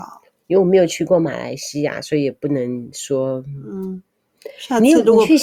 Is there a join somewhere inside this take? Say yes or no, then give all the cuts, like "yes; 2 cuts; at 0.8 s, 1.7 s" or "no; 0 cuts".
no; 0 cuts